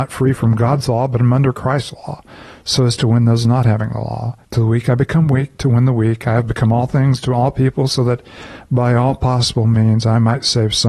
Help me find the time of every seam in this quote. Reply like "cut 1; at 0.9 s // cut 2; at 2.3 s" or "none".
cut 1; at 4.4 s